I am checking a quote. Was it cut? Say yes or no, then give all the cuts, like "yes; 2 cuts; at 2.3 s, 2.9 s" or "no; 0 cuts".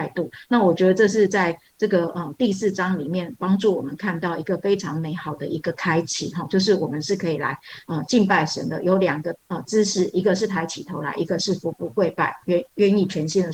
yes; 1 cut; at 9.4 s